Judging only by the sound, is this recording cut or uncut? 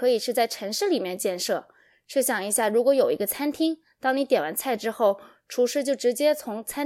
uncut